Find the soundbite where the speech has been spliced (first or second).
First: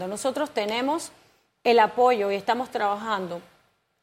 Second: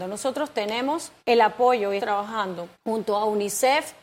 second